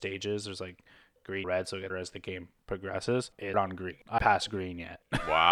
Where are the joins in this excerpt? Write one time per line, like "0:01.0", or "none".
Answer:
0:01.4
0:01.9
0:03.5
0:04.2

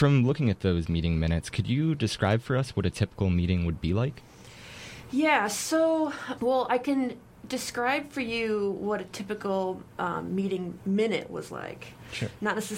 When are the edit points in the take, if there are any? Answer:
none

